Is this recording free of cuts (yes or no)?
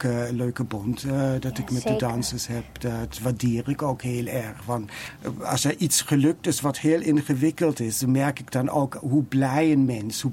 yes